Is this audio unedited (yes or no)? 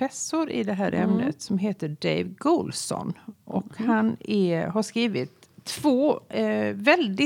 no